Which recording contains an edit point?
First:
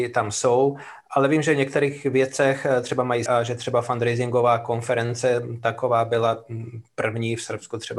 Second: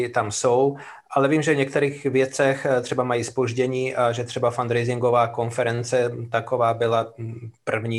first; 1 cut; at 3.3 s

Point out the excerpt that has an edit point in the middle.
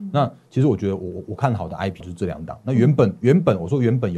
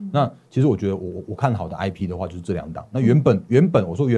first; 1 cut; at 2.0 s

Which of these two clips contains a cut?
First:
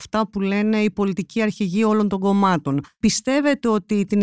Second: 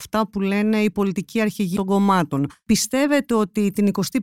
second; 1 cut; at 1.8 s

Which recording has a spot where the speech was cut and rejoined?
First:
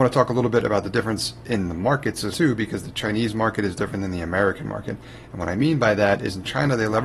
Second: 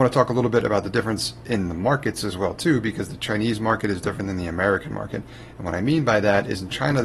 first; 1 cut; at 2.3 s

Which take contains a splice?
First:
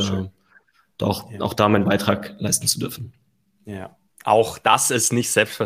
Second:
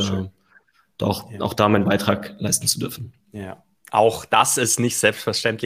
second; 1 cut; at 3.2 s

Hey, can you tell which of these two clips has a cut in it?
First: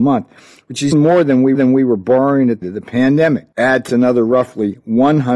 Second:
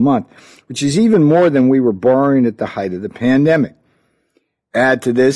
first; 5 cuts; at 0.9 s, 1.5 s, 2.6 s, 3.5 s, 3.9 s

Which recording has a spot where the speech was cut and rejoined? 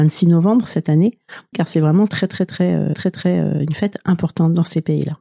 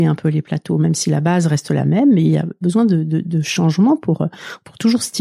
first; 2 cuts; at 1.5 s, 2.9 s

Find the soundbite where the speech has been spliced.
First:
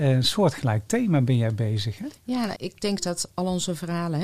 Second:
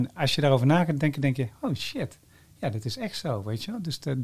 first; 2 cuts; at 2.2 s, 2.6 s

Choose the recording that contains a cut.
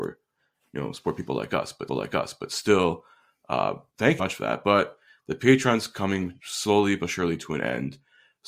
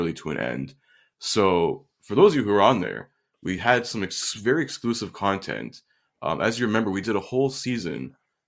first; 2 cuts; at 1.9 s, 4.2 s

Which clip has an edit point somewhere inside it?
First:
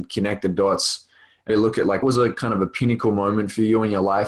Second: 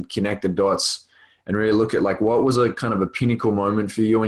first; 2 cuts; at 1.5 s, 2.0 s

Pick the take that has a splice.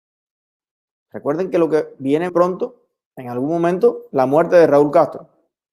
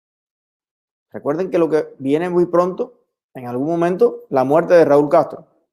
first; 1 cut; at 2.3 s

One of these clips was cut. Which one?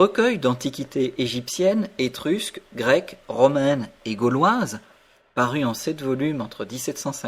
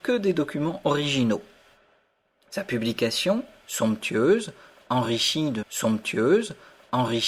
second; 1 cut; at 5.6 s

